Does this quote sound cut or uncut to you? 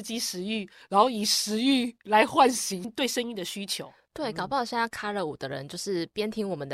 uncut